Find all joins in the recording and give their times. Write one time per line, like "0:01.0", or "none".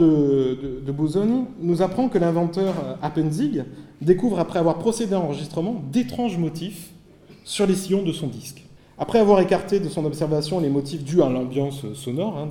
0:08.8